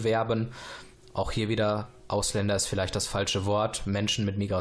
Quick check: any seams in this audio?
no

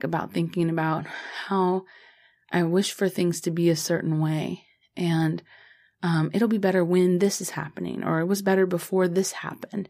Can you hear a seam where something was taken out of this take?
no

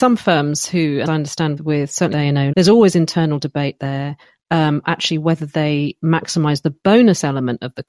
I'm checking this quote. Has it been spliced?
yes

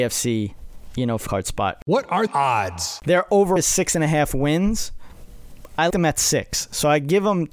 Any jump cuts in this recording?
yes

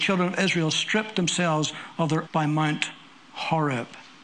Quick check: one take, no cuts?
no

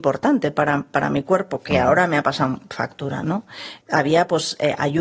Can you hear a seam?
yes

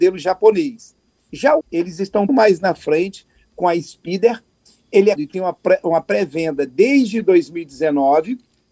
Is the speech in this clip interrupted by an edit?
yes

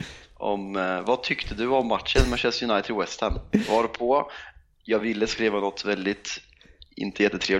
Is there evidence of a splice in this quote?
no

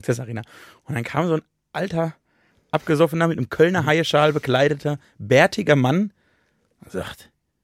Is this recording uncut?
yes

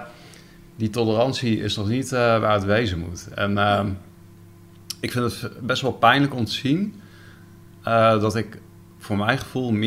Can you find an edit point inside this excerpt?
no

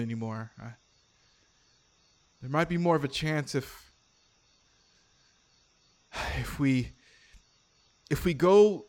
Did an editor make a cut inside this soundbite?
no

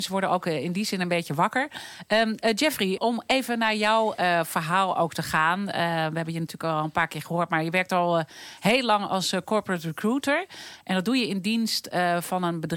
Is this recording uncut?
no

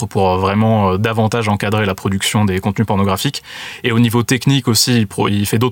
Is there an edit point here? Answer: no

